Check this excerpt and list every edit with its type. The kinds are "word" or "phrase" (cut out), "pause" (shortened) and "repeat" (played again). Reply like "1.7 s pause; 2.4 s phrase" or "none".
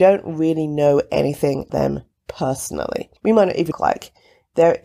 1.7 s word; 3.2 s pause; 3.7 s phrase